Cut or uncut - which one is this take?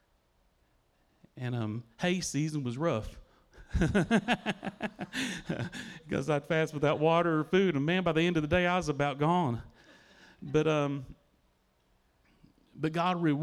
uncut